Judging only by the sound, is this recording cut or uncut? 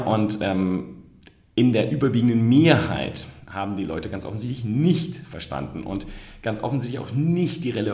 uncut